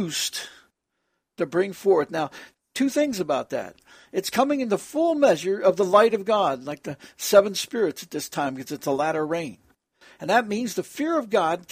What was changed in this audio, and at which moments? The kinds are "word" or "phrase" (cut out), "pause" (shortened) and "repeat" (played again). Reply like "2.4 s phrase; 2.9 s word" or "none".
none

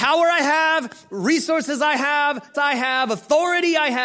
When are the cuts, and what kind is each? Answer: 2.5 s word

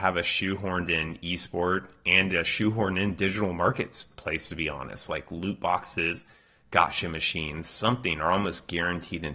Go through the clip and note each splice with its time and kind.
none

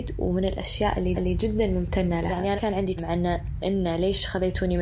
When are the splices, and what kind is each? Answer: 1.1 s repeat; 2.6 s word; 3.0 s word; 3.6 s word

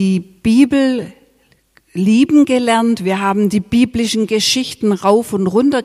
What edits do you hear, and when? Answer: none

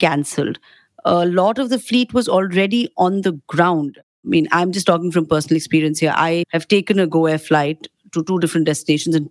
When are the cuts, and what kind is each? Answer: none

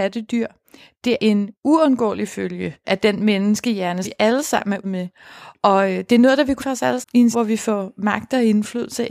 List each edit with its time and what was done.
1.2 s word; 2.8 s word; 4.0 s word; 4.8 s word; 6.6 s word; 7.0 s word; 7.3 s word

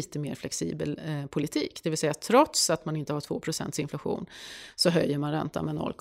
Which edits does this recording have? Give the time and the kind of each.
none

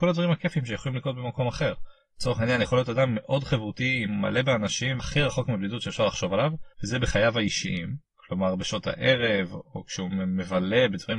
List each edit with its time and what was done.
5.0 s word; 6.7 s pause; 8.1 s pause

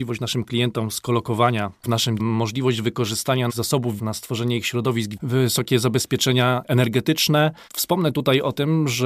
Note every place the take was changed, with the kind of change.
1.8 s phrase; 2.2 s word; 3.5 s word; 4.0 s word; 5.2 s phrase

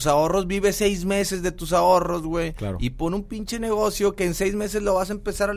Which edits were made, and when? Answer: none

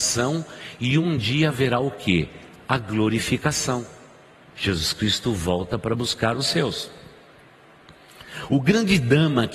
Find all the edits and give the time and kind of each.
none

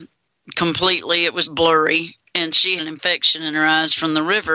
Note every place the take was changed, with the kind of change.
1.4 s word; 2.8 s word

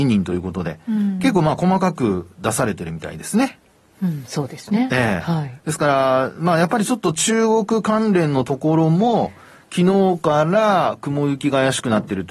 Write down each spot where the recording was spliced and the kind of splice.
none

